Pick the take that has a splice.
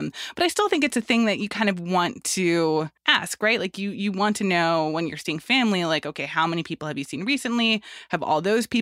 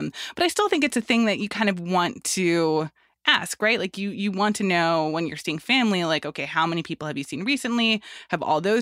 first; 1 cut; at 3.0 s

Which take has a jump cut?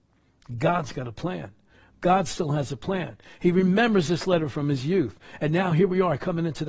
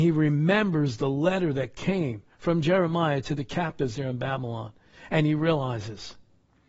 second; 1 cut; at 2.3 s

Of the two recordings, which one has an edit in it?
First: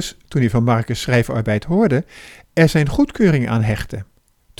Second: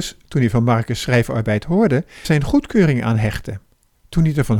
second; 1 cut; at 2.2 s

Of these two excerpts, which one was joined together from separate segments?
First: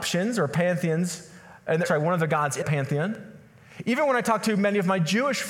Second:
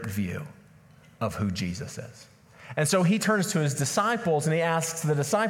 first; 2 cuts; at 1.8 s, 2.6 s

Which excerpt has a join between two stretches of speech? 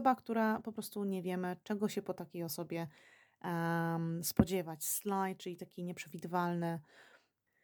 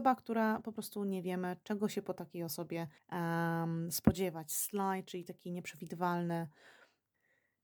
second; 1 cut; at 3.0 s

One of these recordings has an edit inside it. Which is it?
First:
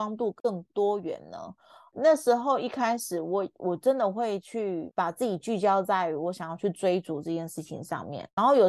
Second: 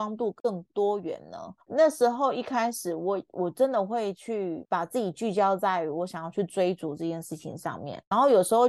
second; 1 cut; at 1.6 s

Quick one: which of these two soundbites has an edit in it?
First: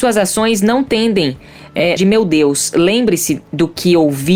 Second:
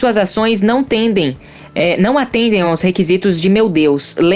first; 1 cut; at 2.0 s

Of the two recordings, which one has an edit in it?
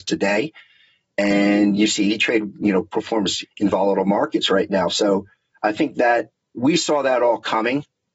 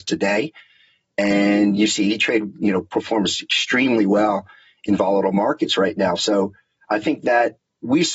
first; 1 cut; at 3.4 s

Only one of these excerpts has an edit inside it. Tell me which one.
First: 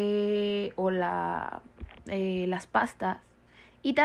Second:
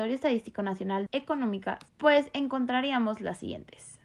second; 2 cuts; at 1.1 s, 1.9 s

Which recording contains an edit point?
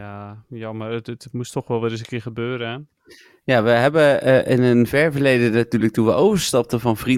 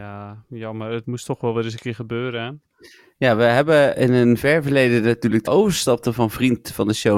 second; 3 cuts; at 1.0 s, 3.9 s, 5.5 s

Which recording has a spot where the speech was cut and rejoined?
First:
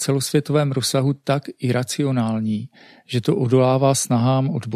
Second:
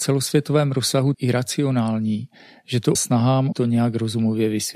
second; 3 cuts; at 1.1 s, 2.9 s, 3.5 s

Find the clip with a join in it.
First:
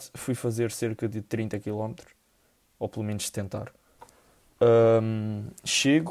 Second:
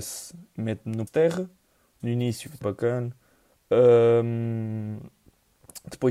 second; 3 cuts; at 1.1 s, 2.0 s, 2.6 s

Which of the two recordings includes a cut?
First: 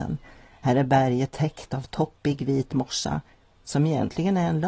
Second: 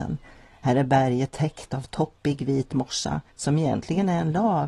second; 1 cut; at 3.3 s

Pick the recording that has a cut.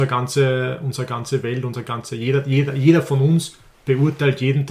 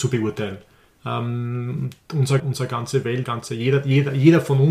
second; 2 cuts; at 2.4 s, 3.2 s

